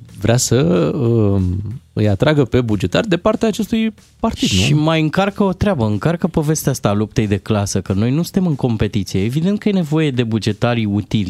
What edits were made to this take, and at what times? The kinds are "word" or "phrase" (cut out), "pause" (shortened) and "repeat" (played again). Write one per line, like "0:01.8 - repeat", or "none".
none